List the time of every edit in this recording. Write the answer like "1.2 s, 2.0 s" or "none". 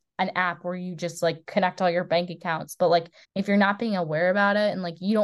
3.2 s